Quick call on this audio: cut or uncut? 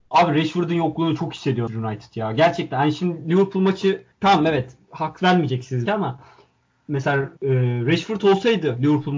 cut